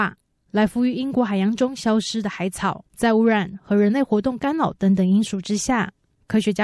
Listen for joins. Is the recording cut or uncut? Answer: cut